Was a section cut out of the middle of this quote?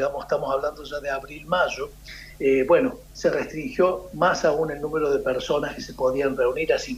no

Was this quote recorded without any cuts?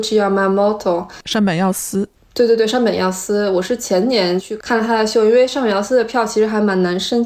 yes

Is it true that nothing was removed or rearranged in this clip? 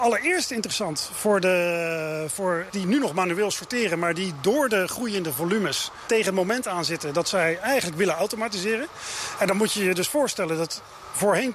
no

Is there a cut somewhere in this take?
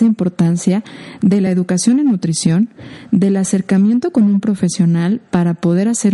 no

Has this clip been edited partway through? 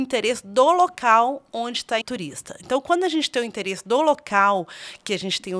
yes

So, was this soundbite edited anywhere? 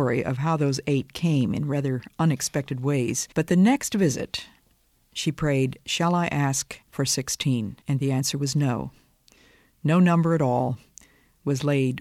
yes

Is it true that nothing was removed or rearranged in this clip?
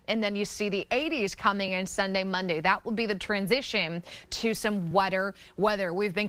yes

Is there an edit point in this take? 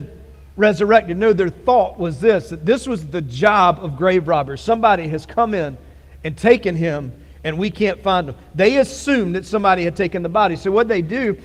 no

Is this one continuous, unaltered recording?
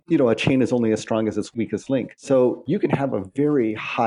yes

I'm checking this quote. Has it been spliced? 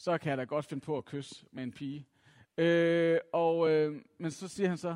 no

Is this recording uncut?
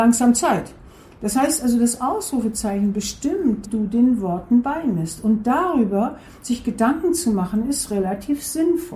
no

